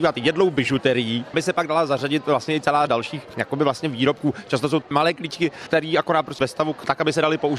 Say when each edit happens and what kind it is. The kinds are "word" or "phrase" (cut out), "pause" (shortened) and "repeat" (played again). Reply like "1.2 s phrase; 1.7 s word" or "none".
1.3 s word; 2.9 s word; 4.8 s word; 5.7 s word; 6.4 s word